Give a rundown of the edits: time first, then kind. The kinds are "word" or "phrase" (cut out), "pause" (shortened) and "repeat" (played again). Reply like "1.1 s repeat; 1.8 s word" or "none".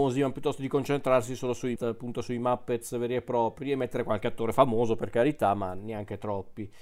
1.8 s word

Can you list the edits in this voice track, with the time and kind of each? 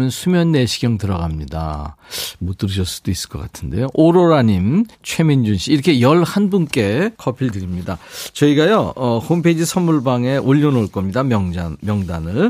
4.9 s pause; 7.2 s pause

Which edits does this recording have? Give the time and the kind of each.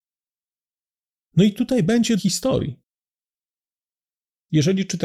2.2 s phrase

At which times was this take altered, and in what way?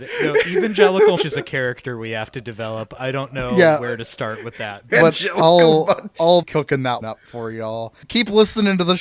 1.2 s word; 4.9 s word; 6.4 s word; 7.0 s word; 8.0 s pause

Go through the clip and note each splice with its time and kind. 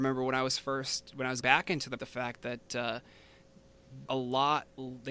1.4 s word; 2.0 s word; 4.1 s word

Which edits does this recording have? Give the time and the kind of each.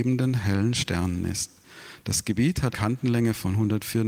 2.7 s word

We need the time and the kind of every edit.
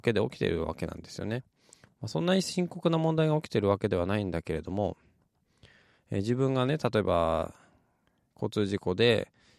none

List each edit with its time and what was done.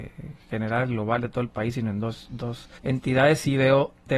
2.8 s pause

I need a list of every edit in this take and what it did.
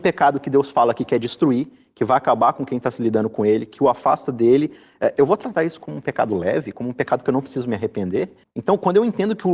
none

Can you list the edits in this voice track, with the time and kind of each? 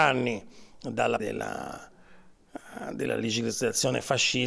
1.2 s word

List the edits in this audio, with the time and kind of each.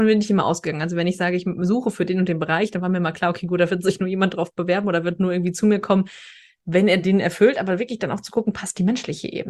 none

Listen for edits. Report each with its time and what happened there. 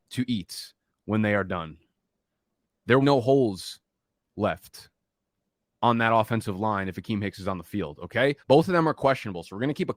3.0 s phrase; 8.4 s pause

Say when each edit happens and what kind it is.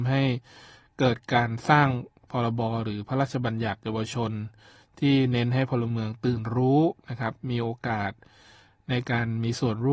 none

